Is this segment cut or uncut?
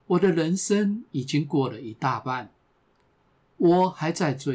uncut